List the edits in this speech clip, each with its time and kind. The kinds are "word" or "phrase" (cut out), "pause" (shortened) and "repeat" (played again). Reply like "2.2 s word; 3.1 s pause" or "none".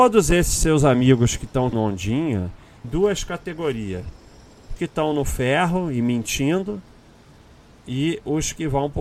1.7 s word; 2.8 s word; 4.8 s phrase